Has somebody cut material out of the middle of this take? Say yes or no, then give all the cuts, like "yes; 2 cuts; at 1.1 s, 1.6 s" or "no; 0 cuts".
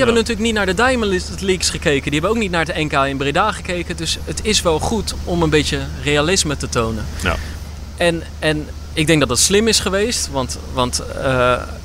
yes; 1 cut; at 5.2 s